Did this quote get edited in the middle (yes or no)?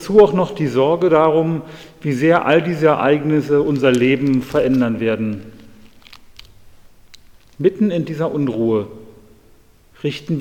no